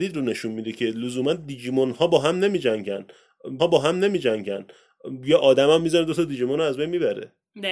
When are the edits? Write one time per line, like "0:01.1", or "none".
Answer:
0:03.6